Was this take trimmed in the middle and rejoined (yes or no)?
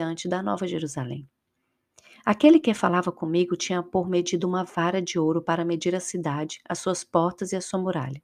no